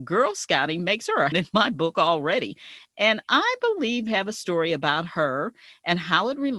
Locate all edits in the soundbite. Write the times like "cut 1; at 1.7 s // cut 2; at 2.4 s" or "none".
cut 1; at 1.3 s // cut 2; at 4.1 s